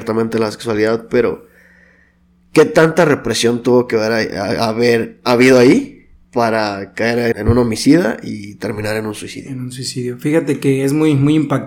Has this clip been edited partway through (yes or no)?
yes